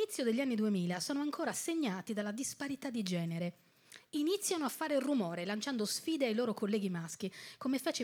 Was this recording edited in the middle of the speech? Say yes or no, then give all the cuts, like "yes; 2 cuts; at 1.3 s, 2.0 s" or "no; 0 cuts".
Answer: no; 0 cuts